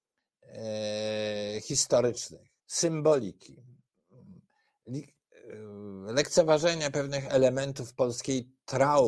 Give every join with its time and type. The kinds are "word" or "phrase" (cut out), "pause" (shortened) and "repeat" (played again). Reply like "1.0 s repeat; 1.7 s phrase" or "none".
2.6 s pause